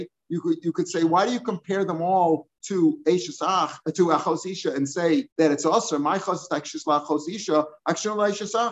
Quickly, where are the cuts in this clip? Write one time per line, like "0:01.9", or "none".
0:05.3